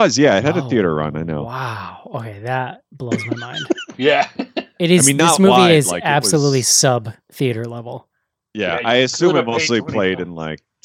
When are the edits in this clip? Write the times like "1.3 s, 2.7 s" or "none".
none